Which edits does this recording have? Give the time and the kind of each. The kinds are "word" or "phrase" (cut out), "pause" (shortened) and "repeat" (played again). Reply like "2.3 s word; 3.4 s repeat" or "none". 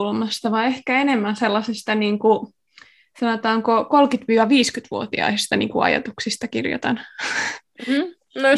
none